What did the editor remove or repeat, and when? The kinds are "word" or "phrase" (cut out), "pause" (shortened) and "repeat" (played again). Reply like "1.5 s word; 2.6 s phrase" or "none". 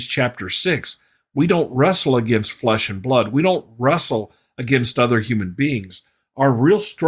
none